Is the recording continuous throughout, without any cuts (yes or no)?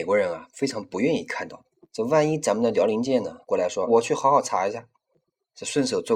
no